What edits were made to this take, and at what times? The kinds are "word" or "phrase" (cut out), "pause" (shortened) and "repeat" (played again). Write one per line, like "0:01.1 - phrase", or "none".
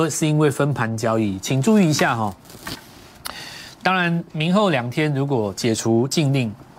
none